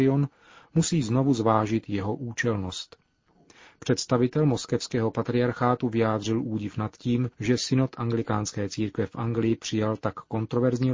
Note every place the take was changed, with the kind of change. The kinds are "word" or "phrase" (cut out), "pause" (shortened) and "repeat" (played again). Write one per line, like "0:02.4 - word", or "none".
0:07.3 - pause